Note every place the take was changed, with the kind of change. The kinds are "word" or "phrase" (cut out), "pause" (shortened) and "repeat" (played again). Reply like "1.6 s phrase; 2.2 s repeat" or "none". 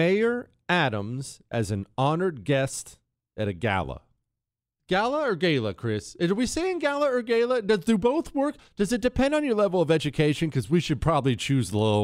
none